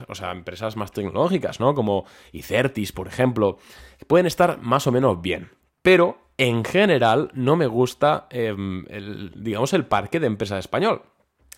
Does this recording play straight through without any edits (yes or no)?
yes